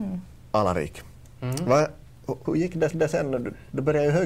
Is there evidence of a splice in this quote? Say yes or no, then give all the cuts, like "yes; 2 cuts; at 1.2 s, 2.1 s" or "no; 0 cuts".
yes; 2 cuts; at 2.5 s, 2.9 s